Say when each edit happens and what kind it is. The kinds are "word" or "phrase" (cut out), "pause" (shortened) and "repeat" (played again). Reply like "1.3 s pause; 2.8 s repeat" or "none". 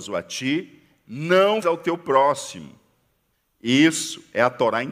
1.6 s word; 3.3 s pause